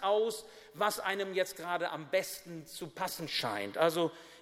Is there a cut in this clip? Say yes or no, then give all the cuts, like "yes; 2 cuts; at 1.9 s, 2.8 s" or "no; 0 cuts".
no; 0 cuts